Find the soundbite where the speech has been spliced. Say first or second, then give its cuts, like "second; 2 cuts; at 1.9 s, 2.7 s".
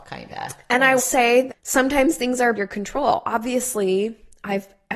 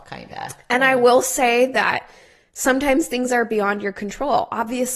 first; 3 cuts; at 1.0 s, 1.5 s, 2.5 s